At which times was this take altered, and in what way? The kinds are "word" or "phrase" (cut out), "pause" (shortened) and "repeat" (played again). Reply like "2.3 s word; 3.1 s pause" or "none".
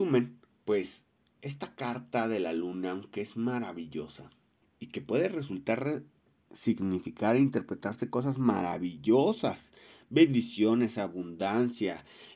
none

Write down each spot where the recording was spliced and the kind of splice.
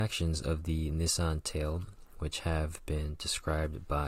none

